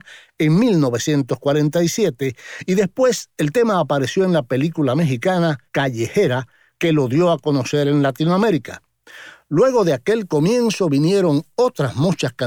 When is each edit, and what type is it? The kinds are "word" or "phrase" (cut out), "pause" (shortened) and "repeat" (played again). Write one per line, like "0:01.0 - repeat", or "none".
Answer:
0:05.7 - pause